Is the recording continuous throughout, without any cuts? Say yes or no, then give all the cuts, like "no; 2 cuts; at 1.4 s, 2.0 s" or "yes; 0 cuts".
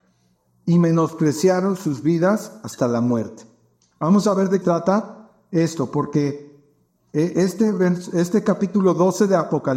no; 1 cut; at 4.6 s